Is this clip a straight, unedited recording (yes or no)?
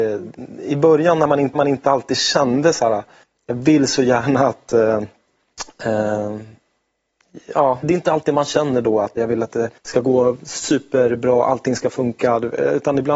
no